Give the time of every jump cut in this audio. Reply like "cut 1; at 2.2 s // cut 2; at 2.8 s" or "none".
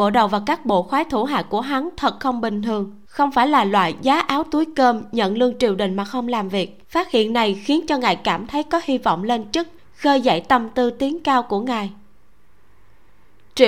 cut 1; at 3.1 s // cut 2; at 6.8 s // cut 3; at 9.8 s